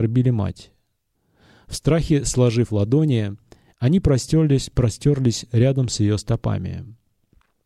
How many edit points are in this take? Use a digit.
0